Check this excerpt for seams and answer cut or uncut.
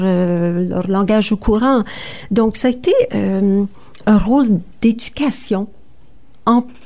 cut